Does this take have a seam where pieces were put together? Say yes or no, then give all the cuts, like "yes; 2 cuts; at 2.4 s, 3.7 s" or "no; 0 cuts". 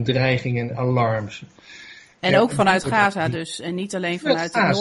no; 0 cuts